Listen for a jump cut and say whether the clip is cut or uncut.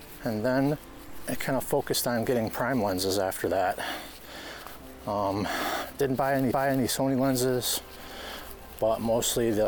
cut